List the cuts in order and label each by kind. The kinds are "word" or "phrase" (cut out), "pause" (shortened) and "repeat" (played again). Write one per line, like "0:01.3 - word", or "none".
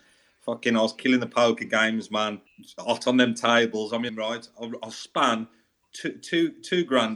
0:02.5 - pause
0:04.1 - phrase